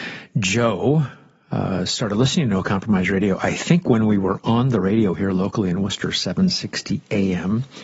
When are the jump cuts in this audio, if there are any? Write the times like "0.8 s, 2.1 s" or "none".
none